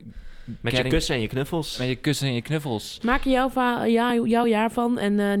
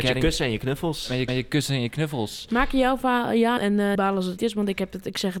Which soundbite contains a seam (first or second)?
second